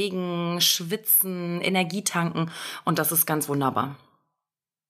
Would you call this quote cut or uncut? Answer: uncut